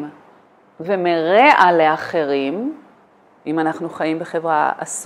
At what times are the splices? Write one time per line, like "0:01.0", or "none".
none